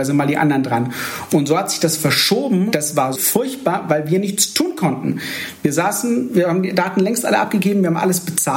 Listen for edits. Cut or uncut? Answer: cut